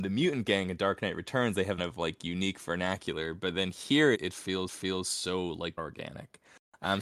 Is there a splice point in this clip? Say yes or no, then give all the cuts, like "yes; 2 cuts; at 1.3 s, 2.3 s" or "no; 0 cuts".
yes; 4 cuts; at 1.8 s, 4.1 s, 4.7 s, 5.8 s